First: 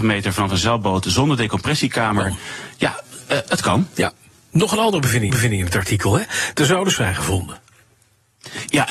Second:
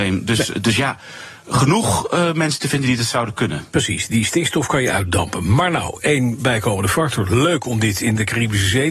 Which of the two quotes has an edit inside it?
first; 2 cuts; at 5.3 s, 7.0 s

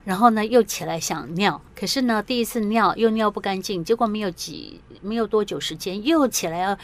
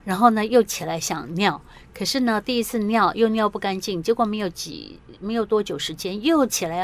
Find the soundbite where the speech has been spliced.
first; 1 cut; at 1.7 s

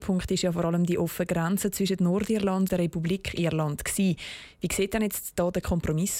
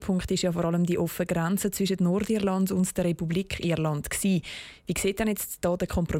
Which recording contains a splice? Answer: first; 1 cut; at 2.7 s

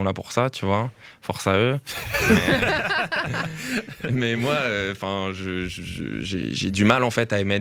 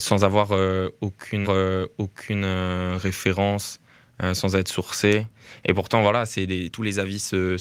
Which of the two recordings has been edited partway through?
second; 2 cuts; at 1.4 s, 6.7 s

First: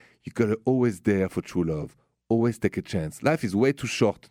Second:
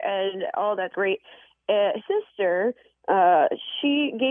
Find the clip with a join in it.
second; 2 cuts; at 0.9 s, 2.0 s

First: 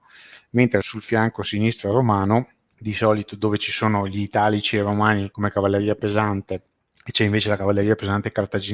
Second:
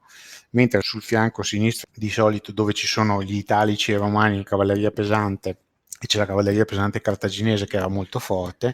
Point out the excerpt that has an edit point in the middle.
second; 3 cuts; at 1.8 s, 4.5 s, 6.1 s

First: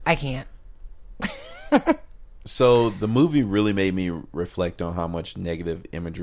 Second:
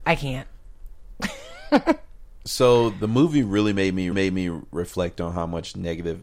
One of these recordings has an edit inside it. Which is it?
second; 1 cut; at 4.1 s

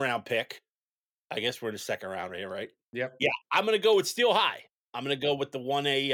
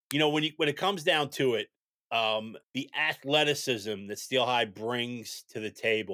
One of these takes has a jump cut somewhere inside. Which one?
second; 1 cut; at 2.6 s

